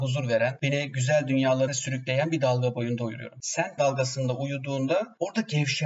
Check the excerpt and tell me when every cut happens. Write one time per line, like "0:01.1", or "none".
0:01.7
0:03.8